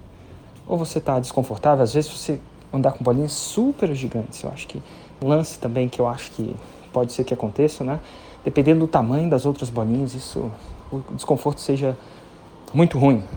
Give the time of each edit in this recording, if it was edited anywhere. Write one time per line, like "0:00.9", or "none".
0:05.2